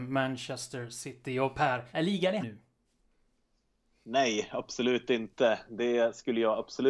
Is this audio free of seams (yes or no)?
no